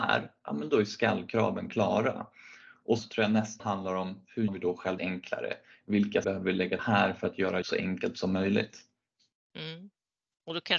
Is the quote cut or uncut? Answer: cut